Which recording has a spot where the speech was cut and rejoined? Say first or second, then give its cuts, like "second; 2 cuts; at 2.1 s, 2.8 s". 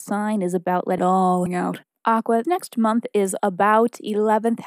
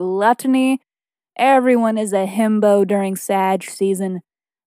first; 4 cuts; at 1.0 s, 1.5 s, 2.4 s, 3.4 s